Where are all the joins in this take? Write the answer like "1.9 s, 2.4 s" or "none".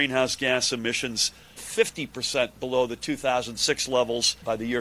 1.6 s